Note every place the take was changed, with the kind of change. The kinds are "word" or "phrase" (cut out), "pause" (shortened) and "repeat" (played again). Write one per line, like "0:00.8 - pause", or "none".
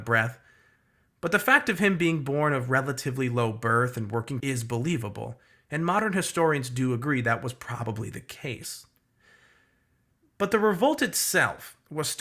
0:04.4 - phrase